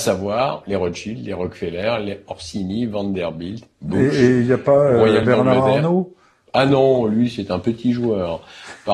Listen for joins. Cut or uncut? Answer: uncut